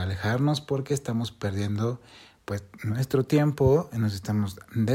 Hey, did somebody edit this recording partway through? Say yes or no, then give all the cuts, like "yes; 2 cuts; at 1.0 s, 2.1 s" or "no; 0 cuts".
no; 0 cuts